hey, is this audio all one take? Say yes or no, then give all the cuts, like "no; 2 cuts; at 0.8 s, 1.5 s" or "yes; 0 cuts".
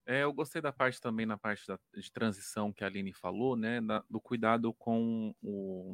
yes; 0 cuts